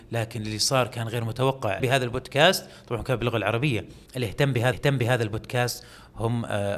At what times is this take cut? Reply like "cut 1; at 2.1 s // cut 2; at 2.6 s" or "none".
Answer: cut 1; at 1.8 s // cut 2; at 4.1 s // cut 3; at 4.7 s